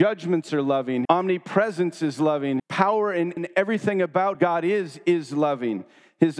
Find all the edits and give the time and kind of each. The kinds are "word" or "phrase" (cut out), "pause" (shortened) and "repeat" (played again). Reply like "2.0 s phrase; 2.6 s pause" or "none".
1.0 s word; 2.6 s word; 3.4 s word; 4.3 s word